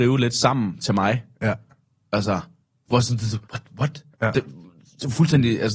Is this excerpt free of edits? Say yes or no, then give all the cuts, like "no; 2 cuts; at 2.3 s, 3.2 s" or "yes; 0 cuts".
no; 3 cuts; at 1.8 s, 3.4 s, 4.1 s